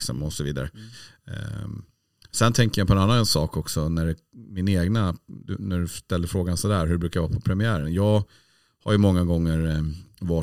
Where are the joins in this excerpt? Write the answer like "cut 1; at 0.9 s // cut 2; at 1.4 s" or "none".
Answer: none